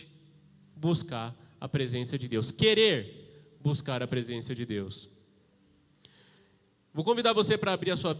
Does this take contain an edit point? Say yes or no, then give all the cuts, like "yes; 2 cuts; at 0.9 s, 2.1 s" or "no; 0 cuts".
no; 0 cuts